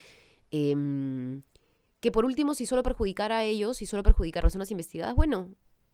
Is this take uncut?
no; 1 cut; at 4.4 s

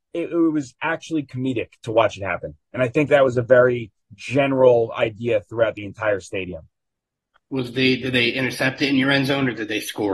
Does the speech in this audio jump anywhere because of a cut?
no; 0 cuts

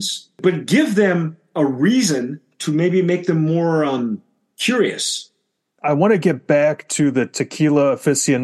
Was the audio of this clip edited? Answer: no; 0 cuts

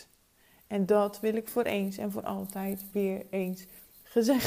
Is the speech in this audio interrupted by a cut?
no; 0 cuts

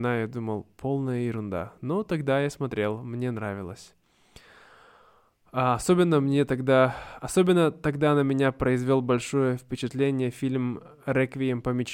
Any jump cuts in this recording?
no; 0 cuts

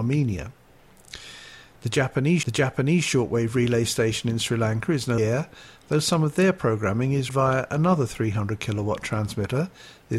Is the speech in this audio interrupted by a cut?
yes; 3 cuts; at 2.4 s, 5.2 s, 7.3 s

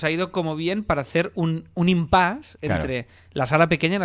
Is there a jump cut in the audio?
no; 0 cuts

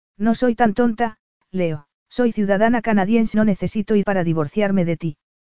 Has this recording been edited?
yes; 3 cuts; at 2.0 s, 3.3 s, 4.0 s

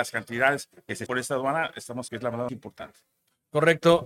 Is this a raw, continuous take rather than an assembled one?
no; 3 cuts; at 1.1 s, 2.1 s, 2.5 s

